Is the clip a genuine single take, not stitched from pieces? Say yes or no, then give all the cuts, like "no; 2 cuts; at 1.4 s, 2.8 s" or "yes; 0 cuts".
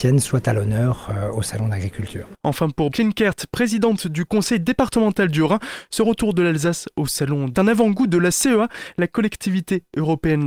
no; 2 cuts; at 2.9 s, 7.5 s